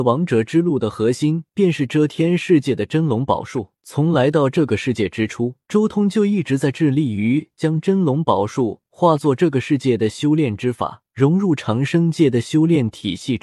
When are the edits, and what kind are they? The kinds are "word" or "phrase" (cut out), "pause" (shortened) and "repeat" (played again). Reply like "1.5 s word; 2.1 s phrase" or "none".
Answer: 3.7 s pause; 5.6 s pause; 11.1 s pause